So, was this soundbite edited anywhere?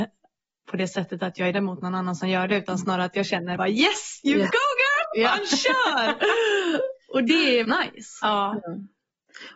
yes; 3 cuts; at 1.5 s, 3.6 s, 7.6 s

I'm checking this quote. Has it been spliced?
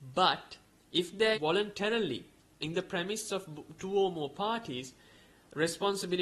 yes; 1 cut; at 1.3 s

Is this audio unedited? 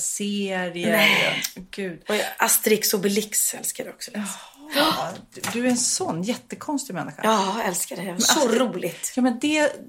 yes; 0 cuts

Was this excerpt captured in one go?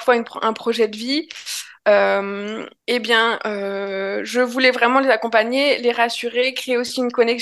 no; 1 cut; at 2.8 s

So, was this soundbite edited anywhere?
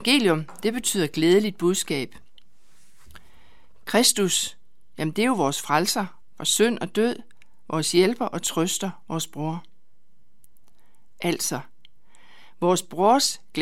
no; 0 cuts

